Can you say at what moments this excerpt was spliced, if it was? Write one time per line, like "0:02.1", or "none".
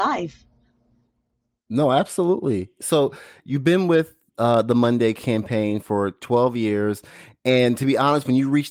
none